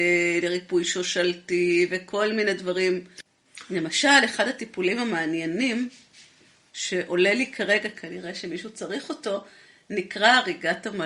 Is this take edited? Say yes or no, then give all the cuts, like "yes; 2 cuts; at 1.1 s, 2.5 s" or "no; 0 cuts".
no; 0 cuts